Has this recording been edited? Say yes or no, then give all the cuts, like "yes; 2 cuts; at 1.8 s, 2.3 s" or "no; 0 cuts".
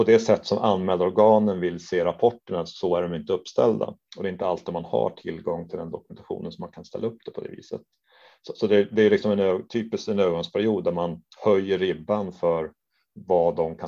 no; 0 cuts